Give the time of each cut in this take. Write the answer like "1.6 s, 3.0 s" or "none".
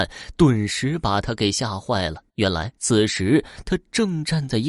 2.3 s, 2.8 s